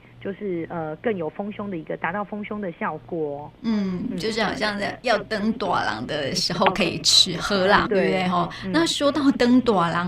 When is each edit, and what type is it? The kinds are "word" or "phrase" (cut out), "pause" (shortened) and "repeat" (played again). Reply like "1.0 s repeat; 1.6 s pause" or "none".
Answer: 7.9 s word